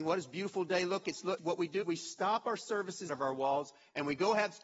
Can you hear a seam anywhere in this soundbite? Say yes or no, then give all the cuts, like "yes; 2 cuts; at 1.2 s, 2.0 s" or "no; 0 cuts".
yes; 4 cuts; at 1.0 s, 1.4 s, 1.8 s, 3.1 s